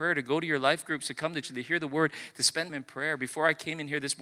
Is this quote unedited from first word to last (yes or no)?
no